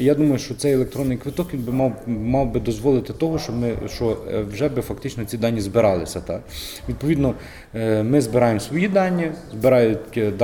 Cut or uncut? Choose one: uncut